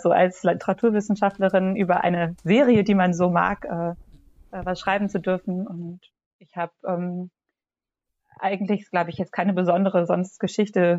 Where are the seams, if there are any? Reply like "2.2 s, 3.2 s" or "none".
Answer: none